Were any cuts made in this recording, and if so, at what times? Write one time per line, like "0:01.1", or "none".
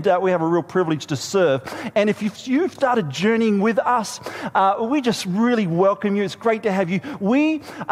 0:02.8